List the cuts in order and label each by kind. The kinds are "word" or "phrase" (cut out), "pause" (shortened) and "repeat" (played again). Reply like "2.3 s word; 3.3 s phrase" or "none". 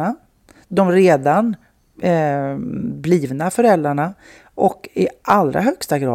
none